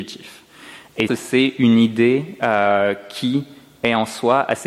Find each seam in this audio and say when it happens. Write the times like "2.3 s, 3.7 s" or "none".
1.1 s